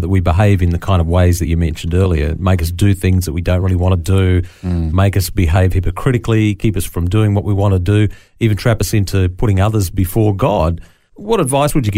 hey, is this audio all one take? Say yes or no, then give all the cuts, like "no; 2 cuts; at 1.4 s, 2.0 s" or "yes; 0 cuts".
yes; 0 cuts